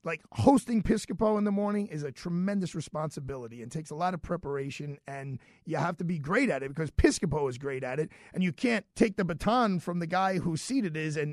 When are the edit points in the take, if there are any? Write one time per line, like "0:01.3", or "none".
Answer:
0:08.9